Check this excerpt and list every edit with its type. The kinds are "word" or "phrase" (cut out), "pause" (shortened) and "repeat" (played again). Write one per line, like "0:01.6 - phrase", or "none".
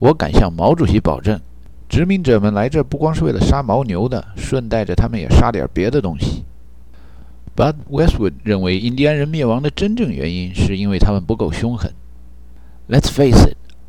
none